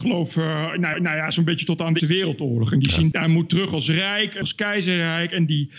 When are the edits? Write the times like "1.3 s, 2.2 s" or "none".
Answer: 0.9 s, 2.0 s, 3.1 s, 4.4 s

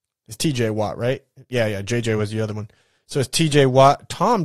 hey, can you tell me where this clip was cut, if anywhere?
none

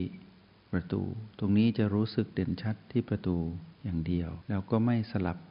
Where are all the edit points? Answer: 3.7 s, 4.4 s

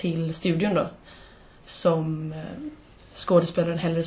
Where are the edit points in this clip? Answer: none

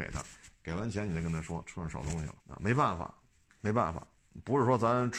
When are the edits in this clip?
2.4 s

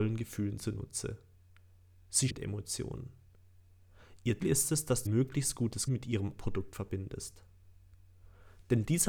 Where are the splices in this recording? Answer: 2.3 s, 4.4 s, 5.0 s, 5.9 s, 6.4 s

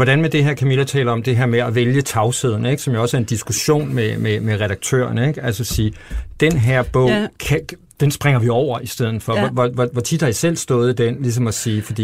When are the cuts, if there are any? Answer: 7.3 s

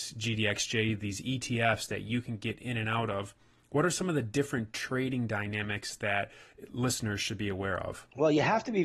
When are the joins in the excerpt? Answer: none

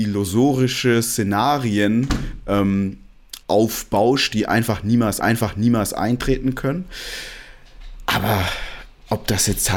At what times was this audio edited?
3.4 s, 5.2 s

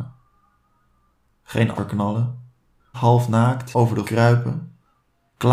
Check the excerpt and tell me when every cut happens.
1.7 s, 2.9 s, 3.7 s, 4.0 s

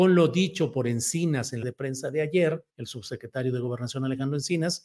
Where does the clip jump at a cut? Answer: 1.6 s, 2.7 s

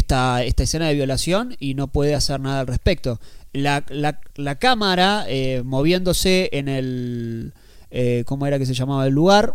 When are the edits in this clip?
none

